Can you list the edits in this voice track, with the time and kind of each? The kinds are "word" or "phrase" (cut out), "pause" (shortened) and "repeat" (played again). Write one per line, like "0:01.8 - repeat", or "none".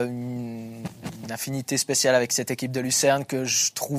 none